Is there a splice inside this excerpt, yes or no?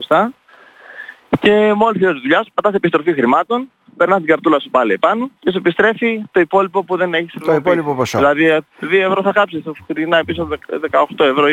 yes